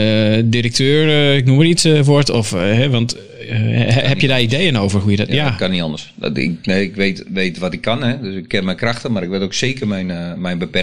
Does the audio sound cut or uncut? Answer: uncut